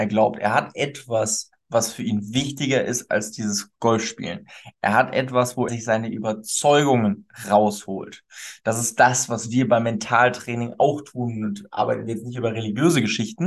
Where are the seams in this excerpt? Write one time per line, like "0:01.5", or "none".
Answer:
0:05.7